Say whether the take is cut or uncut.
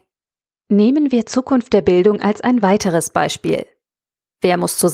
uncut